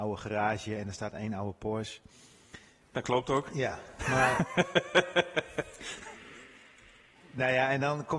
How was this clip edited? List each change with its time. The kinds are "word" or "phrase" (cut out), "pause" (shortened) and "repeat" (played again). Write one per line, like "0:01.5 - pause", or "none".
0:02.8 - pause